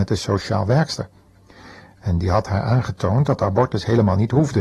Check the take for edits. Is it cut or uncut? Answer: uncut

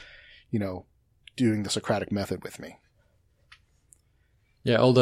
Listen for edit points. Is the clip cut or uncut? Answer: uncut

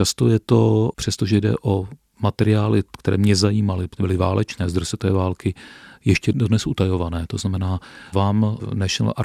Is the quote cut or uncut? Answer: uncut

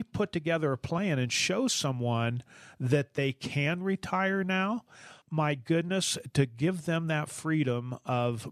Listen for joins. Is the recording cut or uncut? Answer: cut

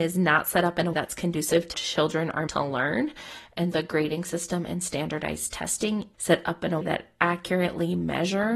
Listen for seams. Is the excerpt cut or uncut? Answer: cut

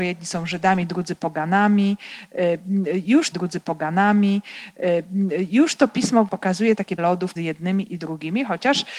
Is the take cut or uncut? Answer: cut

